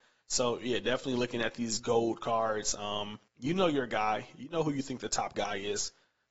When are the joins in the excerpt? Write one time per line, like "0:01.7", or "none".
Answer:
0:03.3